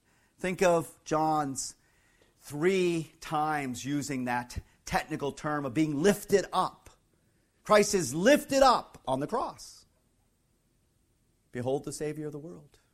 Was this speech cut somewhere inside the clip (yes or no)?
no